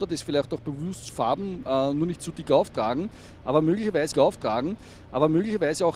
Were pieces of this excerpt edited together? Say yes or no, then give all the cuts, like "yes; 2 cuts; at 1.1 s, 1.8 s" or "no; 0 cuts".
yes; 2 cuts; at 1.1 s, 4.1 s